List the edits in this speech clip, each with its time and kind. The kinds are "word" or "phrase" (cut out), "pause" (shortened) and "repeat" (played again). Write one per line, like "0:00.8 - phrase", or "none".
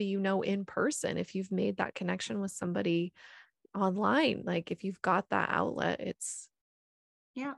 none